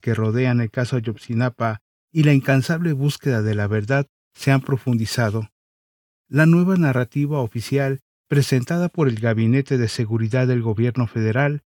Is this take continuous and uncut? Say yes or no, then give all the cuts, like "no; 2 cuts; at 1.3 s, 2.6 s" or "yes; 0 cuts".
yes; 0 cuts